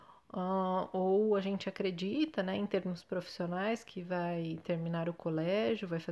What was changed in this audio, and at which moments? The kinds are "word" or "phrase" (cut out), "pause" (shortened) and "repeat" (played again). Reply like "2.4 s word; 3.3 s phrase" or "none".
none

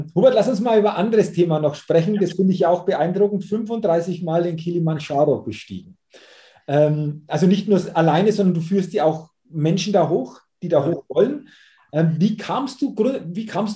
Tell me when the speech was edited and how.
none

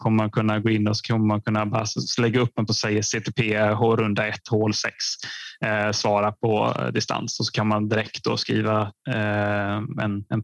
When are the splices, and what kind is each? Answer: 2.7 s word

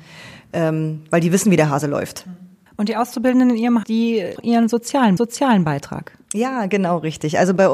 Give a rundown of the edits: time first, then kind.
2.7 s pause; 3.8 s word; 4.4 s phrase; 5.2 s repeat

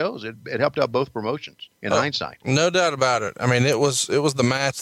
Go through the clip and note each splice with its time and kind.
1.7 s pause

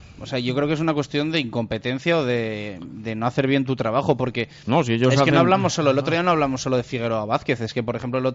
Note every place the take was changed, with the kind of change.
none

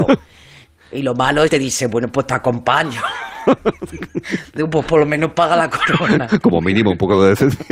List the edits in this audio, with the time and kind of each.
1.5 s word

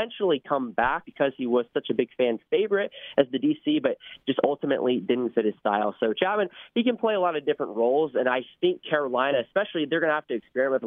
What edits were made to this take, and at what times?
1.0 s word

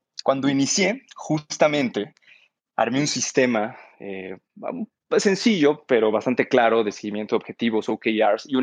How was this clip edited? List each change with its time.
none

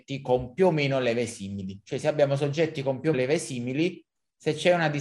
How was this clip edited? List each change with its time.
3.1 s word

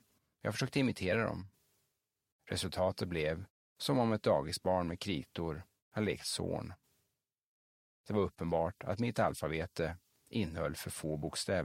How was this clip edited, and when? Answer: none

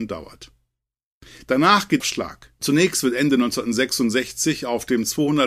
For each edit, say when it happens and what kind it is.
2.0 s phrase

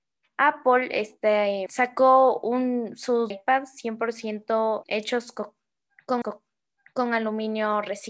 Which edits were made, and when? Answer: 1.7 s word; 3.3 s phrase; 4.8 s word; 6.2 s repeat

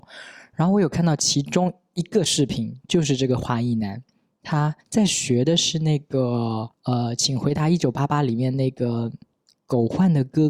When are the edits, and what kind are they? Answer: 4.8 s pause; 6.7 s pause

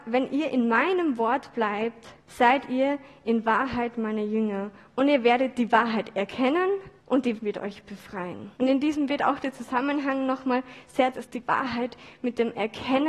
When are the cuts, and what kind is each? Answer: 2.2 s pause; 7.0 s pause; 7.4 s word; 8.5 s pause; 9.1 s word; 11.1 s word

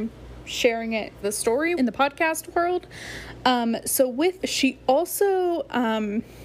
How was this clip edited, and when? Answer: 1.2 s word; 1.8 s word; 4.4 s word

